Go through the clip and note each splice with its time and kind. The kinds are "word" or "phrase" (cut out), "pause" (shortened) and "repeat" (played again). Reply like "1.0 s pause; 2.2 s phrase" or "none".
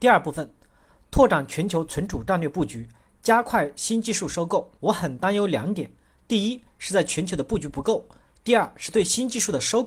4.8 s pause